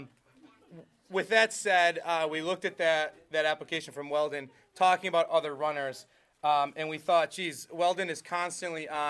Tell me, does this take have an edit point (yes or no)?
no